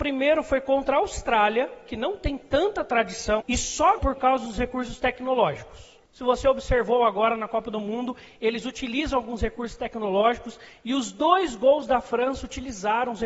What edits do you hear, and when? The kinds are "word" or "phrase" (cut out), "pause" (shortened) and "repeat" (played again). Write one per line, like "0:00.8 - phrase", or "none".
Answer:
0:03.4 - word
0:04.0 - word